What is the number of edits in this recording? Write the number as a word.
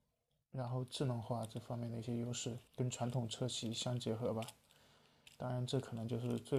one